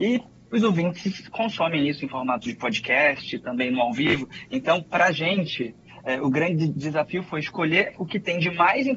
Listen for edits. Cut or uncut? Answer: uncut